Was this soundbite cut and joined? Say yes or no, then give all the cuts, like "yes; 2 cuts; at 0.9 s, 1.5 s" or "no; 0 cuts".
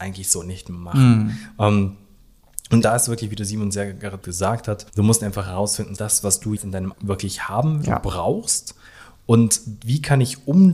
yes; 7 cuts; at 2.8 s, 4.2 s, 4.9 s, 6.0 s, 6.6 s, 6.9 s, 7.8 s